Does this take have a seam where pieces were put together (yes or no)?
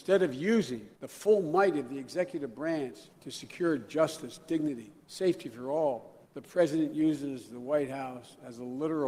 yes